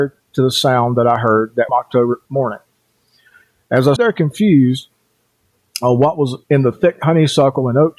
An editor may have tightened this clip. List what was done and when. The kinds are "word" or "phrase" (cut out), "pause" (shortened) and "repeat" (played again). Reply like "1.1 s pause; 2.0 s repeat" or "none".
1.7 s word; 2.3 s pause; 4.0 s word; 6.4 s pause